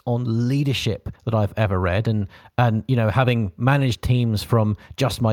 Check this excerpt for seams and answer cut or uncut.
cut